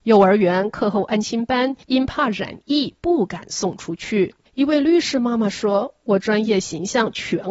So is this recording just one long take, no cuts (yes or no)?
no